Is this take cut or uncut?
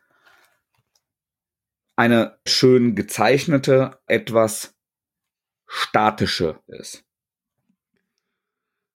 cut